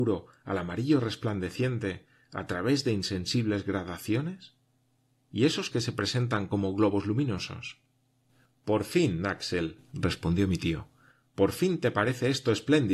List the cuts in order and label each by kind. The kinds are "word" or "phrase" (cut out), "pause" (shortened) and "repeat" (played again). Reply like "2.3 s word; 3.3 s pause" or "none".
5.7 s word; 8.3 s pause

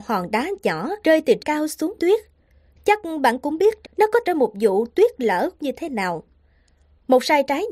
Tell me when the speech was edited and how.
1.0 s pause; 1.4 s word; 2.0 s phrase; 3.8 s word; 4.2 s phrase; 5.6 s phrase

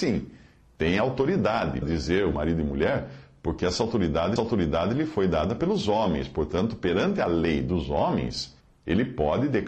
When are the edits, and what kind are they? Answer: 1.8 s word; 2.3 s phrase; 4.4 s repeat; 8.6 s pause

